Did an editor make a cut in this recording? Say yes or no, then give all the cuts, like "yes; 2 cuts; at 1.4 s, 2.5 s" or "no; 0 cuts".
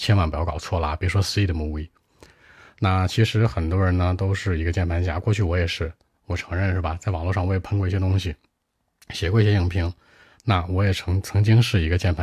no; 0 cuts